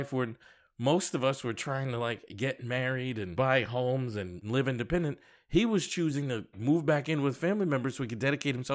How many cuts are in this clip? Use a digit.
1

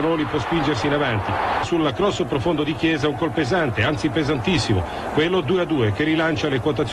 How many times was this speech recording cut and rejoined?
3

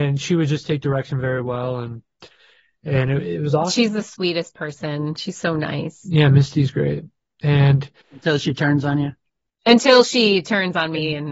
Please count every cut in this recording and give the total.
0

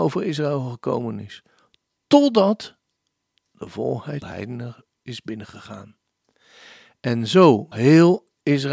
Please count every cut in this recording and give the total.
2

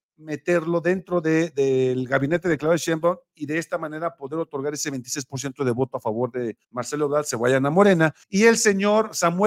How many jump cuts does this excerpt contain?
2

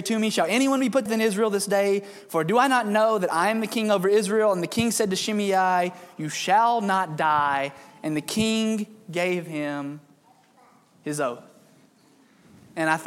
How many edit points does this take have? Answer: 1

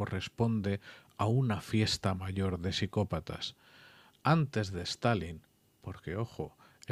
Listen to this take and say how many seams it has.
0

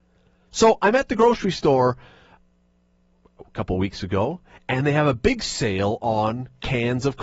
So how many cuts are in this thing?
0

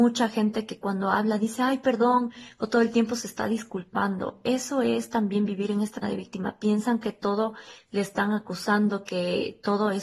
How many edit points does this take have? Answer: 1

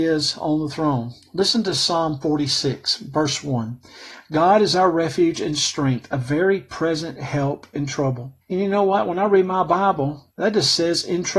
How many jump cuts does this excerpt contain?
2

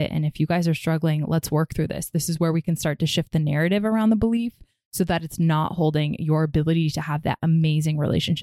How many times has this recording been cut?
0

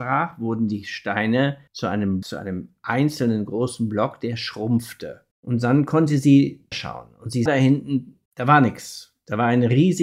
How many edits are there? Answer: 6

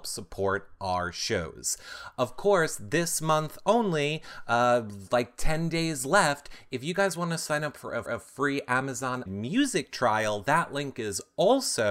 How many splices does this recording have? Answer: 2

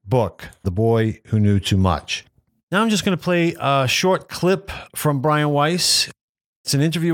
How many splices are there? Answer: 0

